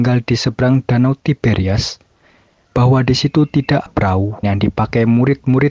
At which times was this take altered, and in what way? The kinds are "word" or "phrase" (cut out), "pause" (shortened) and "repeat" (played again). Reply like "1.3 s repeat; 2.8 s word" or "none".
2.6 s word; 3.9 s word; 4.4 s word

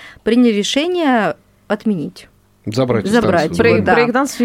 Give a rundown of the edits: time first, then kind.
none

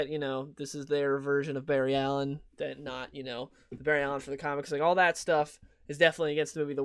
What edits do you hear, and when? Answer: none

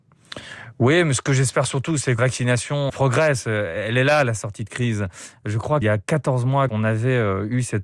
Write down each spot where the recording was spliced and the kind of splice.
2.2 s word; 2.9 s word; 5.8 s word; 6.7 s word

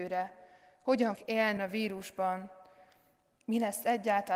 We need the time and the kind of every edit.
1.2 s word; 1.6 s word

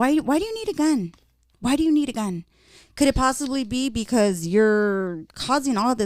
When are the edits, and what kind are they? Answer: none

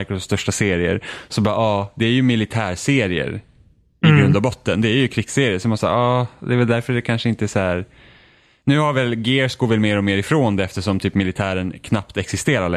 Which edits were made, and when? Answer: none

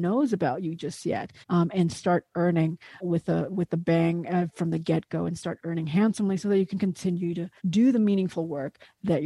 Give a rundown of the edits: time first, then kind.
1.4 s pause; 3.0 s word; 7.6 s pause

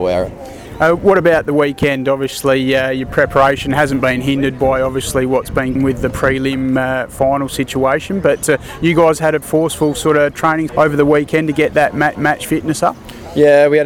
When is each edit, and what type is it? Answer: 5.8 s phrase; 9.4 s word; 10.7 s word; 12.1 s repeat

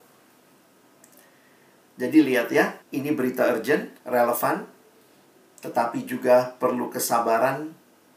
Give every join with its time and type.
2.8 s pause; 4.0 s pause

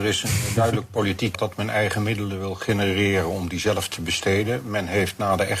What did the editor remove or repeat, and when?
1.3 s word

